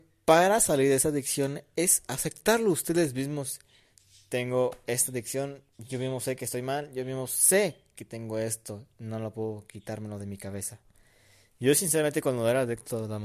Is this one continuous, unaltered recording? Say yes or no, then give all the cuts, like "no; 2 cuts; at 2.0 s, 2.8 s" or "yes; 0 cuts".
yes; 0 cuts